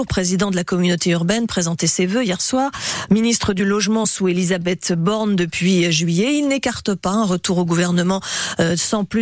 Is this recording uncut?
yes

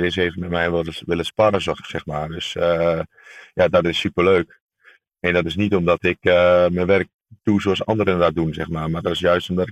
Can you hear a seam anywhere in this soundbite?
no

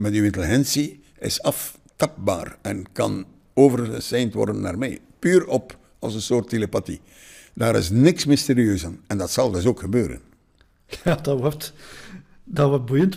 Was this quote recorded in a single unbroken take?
yes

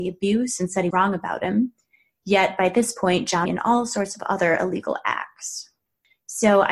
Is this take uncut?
no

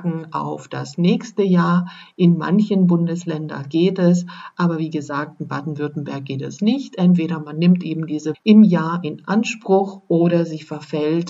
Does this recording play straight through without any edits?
no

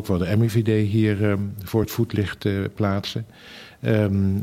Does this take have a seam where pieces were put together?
no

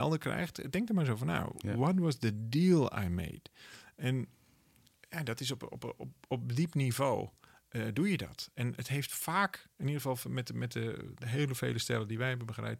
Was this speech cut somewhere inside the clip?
no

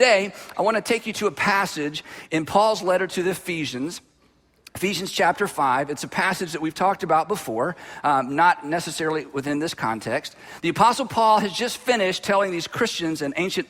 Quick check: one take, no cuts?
yes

